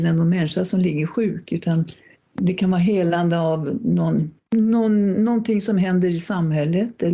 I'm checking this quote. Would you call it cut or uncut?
cut